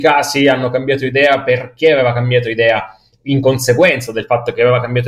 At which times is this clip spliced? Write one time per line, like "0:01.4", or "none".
none